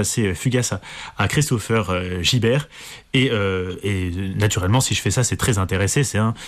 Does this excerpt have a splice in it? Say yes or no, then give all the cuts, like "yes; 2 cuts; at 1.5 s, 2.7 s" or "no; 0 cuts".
no; 0 cuts